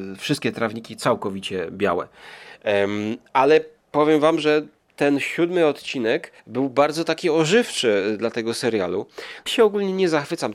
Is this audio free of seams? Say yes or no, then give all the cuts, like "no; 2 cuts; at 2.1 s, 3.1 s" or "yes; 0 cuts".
no; 2 cuts; at 6.4 s, 9.5 s